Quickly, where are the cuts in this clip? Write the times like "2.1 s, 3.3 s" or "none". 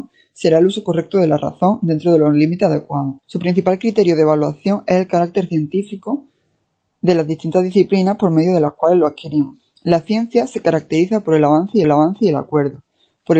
3.2 s, 6.6 s, 9.8 s, 11.8 s